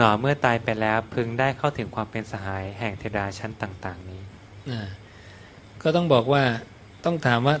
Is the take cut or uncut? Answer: uncut